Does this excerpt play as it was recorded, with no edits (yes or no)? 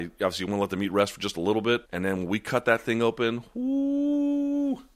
no